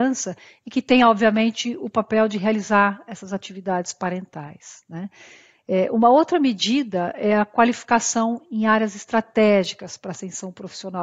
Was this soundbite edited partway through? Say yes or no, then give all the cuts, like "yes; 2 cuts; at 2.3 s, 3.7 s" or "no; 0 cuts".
no; 0 cuts